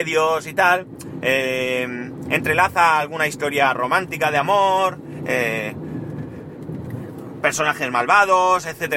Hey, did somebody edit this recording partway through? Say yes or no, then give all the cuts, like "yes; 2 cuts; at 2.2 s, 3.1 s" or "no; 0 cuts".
no; 0 cuts